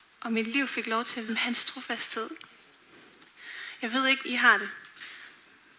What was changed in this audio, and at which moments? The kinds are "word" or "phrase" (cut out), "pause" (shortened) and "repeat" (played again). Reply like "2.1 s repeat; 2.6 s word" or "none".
1.3 s word; 4.2 s word